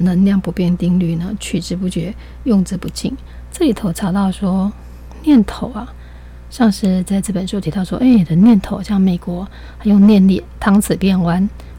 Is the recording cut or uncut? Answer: uncut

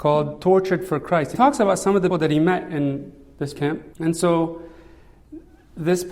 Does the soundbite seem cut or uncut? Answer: cut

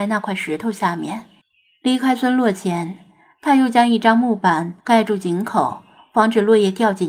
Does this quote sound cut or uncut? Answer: cut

